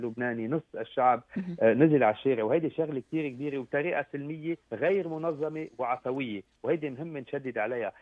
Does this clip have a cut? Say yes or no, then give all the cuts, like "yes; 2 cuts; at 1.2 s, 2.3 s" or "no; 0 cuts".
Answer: yes; 1 cut; at 4.6 s